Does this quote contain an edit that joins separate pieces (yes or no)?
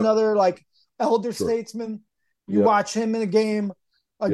no